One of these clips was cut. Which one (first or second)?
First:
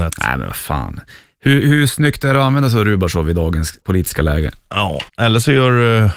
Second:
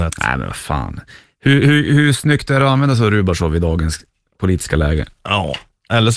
first